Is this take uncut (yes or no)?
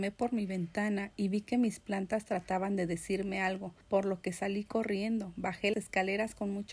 no